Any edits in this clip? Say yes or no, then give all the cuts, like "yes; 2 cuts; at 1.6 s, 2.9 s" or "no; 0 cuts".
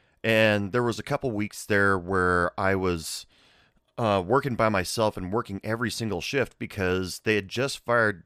no; 0 cuts